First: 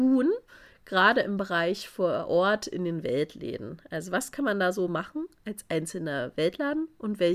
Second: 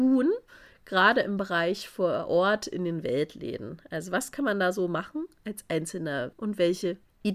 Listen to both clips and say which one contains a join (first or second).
second